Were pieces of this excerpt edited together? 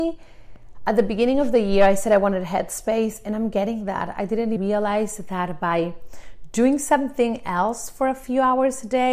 yes; 1 cut; at 4.6 s

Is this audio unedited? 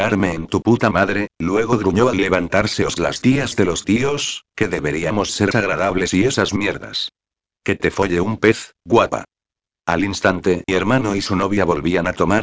no; 3 cuts; at 3.0 s, 5.5 s, 10.7 s

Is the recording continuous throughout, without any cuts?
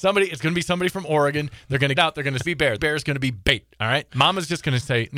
no; 3 cuts; at 2.0 s, 2.4 s, 2.8 s

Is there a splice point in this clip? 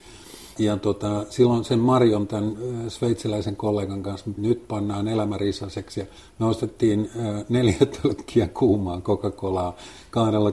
yes; 2 cuts; at 4.4 s, 6.2 s

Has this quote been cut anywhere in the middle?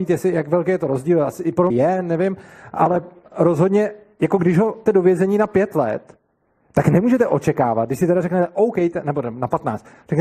yes; 2 cuts; at 1.7 s, 4.9 s

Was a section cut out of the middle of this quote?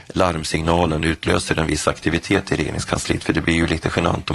no; 0 cuts

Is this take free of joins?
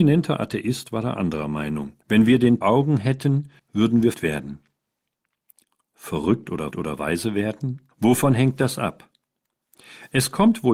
no; 6 cuts; at 2.0 s, 2.6 s, 3.6 s, 4.1 s, 6.7 s, 7.9 s

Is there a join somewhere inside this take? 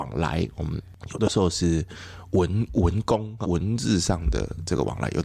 yes; 1 cut; at 3.4 s

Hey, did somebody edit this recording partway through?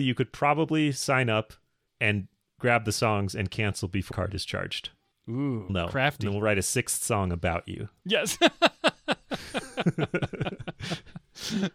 yes; 2 cuts; at 4.1 s, 5.7 s

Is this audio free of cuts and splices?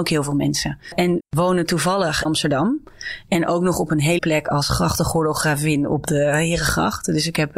no; 3 cuts; at 1.2 s, 2.2 s, 4.2 s

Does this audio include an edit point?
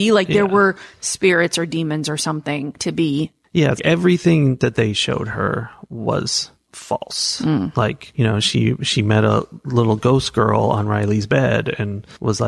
yes; 3 cuts; at 2.8 s, 3.8 s, 8.1 s

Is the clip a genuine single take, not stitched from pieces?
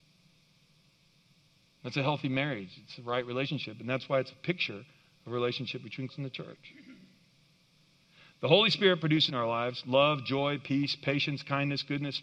no; 2 cuts; at 6.1 s, 9.3 s

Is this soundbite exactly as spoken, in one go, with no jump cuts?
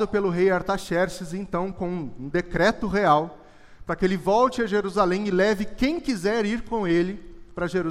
yes; 0 cuts

